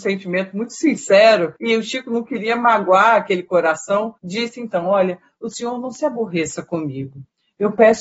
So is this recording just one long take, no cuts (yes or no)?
no